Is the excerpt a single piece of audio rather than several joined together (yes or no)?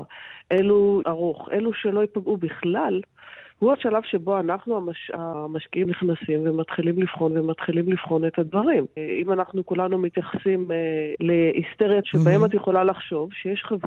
no